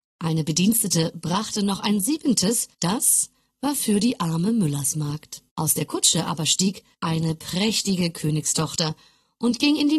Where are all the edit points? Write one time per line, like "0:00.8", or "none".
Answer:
0:02.7
0:05.5
0:06.9